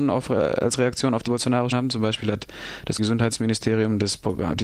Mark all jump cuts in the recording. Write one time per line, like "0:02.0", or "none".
0:01.3
0:01.7
0:03.0